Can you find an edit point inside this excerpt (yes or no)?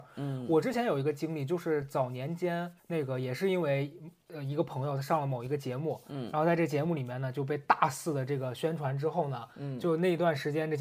yes